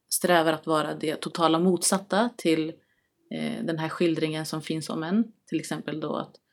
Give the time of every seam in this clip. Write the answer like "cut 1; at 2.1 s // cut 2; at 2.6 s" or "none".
none